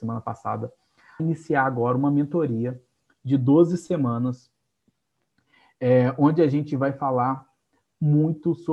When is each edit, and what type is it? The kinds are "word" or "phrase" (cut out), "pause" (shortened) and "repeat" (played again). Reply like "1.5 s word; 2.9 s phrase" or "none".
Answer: 1.2 s phrase